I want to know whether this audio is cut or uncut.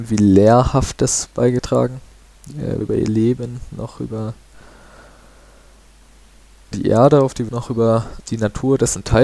cut